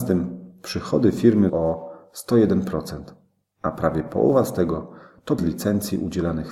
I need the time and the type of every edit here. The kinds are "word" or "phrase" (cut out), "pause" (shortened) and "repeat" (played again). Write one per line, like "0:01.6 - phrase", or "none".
0:01.5 - word
0:05.4 - word